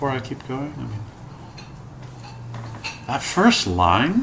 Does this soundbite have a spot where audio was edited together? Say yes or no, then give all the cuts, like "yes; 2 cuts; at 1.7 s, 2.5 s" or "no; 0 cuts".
no; 0 cuts